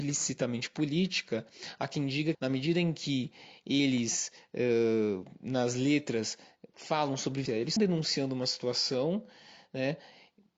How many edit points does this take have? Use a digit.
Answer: 3